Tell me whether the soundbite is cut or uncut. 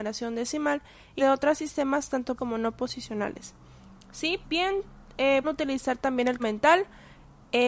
cut